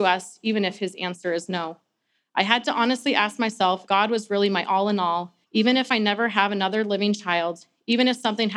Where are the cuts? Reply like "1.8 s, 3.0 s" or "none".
3.9 s, 5.4 s